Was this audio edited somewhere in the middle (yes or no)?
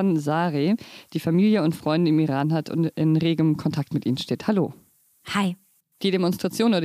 no